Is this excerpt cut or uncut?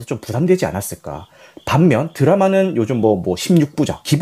uncut